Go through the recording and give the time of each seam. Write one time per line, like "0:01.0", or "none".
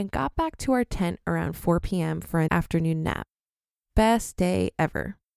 0:02.5